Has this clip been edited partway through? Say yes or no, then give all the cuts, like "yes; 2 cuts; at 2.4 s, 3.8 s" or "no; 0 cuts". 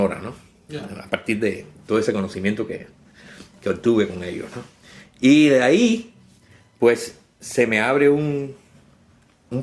no; 0 cuts